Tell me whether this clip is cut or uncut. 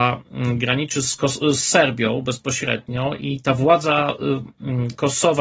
uncut